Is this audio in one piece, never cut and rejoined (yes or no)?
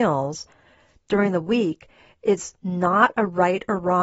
yes